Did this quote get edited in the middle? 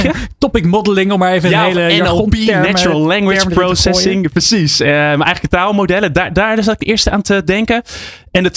no; 0 cuts

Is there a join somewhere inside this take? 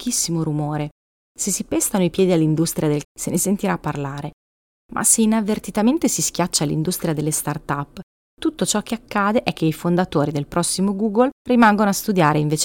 yes; 1 cut; at 3.0 s

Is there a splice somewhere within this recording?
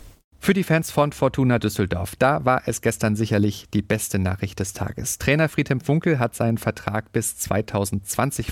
no; 0 cuts

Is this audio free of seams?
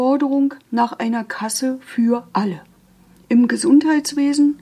yes; 0 cuts

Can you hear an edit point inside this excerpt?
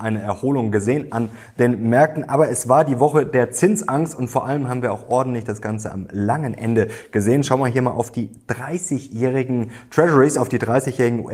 no; 0 cuts

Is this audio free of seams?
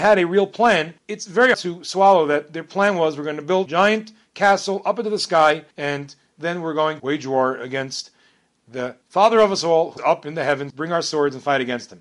no; 8 cuts; at 1.0 s, 1.5 s, 3.7 s, 5.7 s, 7.0 s, 9.0 s, 10.0 s, 10.7 s

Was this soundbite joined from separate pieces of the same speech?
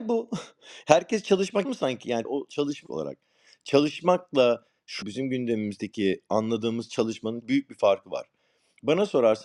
yes; 5 cuts; at 1.6 s, 2.2 s, 2.9 s, 5.0 s, 7.4 s

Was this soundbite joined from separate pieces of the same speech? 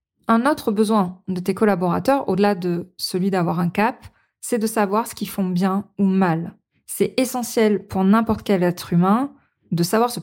no; 0 cuts

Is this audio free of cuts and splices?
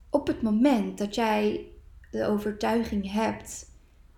yes; 0 cuts

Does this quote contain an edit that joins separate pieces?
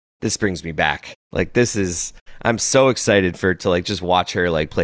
no; 0 cuts

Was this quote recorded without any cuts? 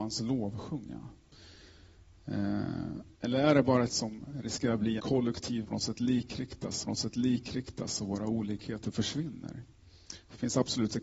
no; 5 cuts; at 3.1 s, 3.9 s, 5.0 s, 5.6 s, 6.8 s

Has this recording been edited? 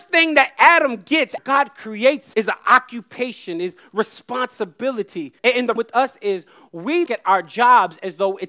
yes; 5 cuts; at 1.4 s, 2.3 s, 5.4 s, 5.8 s, 7.1 s

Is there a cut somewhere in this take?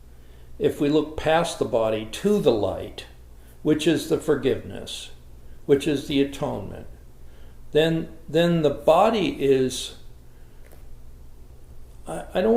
no; 0 cuts

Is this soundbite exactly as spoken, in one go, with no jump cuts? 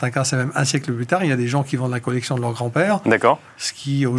yes; 0 cuts

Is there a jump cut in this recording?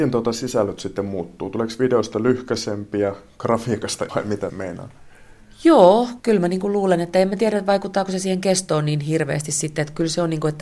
yes; 3 cuts; at 4.1 s, 4.5 s, 6.2 s

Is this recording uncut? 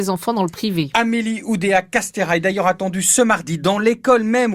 yes; 0 cuts

